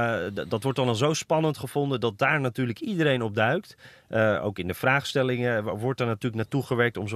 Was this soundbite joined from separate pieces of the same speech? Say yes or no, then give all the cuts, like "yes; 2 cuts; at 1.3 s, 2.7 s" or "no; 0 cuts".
no; 0 cuts